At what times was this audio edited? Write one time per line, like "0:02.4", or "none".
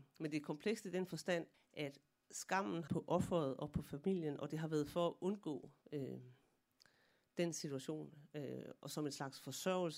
0:01.5
0:02.9
0:05.8